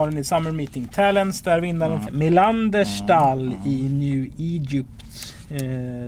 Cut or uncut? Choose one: cut